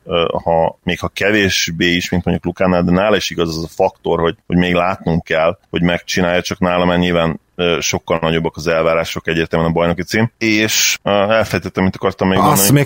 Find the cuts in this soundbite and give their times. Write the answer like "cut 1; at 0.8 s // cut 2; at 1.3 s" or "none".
cut 1; at 5.6 s